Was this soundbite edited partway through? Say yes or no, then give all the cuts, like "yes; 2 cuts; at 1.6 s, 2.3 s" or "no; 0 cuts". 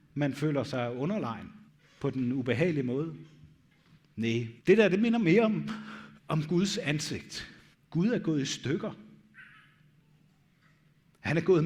yes; 4 cuts; at 1.7 s, 4.6 s, 6.2 s, 7.7 s